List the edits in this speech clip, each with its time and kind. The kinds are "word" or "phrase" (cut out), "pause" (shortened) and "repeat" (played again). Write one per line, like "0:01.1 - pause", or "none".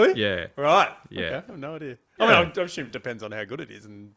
none